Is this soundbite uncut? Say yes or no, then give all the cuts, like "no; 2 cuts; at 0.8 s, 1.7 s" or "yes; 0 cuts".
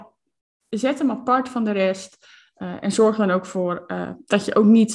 yes; 0 cuts